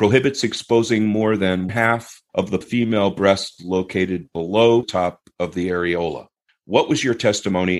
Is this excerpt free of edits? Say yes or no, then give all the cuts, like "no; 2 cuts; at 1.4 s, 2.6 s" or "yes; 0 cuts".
no; 5 cuts; at 1.7 s, 2.3 s, 2.6 s, 4.8 s, 6.4 s